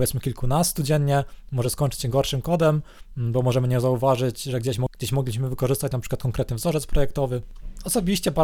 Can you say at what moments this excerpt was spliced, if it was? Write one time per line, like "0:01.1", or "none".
none